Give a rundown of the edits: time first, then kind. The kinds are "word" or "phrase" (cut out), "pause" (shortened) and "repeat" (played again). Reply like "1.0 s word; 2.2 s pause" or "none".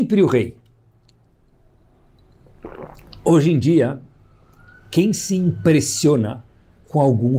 none